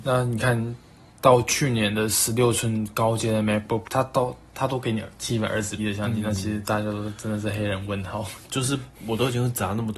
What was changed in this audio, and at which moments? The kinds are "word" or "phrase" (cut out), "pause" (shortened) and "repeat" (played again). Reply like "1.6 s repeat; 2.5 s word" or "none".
3.8 s word; 5.8 s word